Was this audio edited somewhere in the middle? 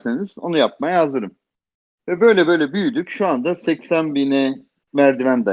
no; 0 cuts

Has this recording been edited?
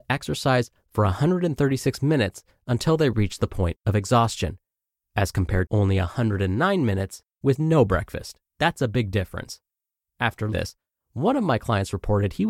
yes; 3 cuts; at 5.7 s, 8.5 s, 10.5 s

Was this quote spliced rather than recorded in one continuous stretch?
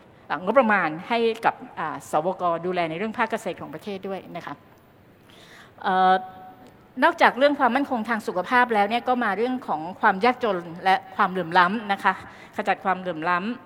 no; 0 cuts

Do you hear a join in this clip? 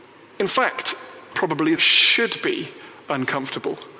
yes; 2 cuts; at 1.3 s, 1.8 s

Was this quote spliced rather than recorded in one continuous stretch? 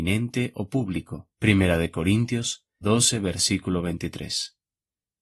yes; 2 cuts; at 1.3 s, 2.8 s

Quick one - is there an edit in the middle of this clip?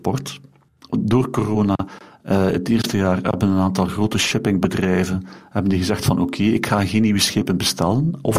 no; 0 cuts

